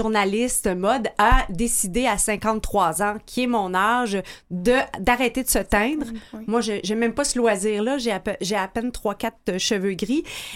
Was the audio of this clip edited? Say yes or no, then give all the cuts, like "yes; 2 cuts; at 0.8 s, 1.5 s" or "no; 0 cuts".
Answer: no; 0 cuts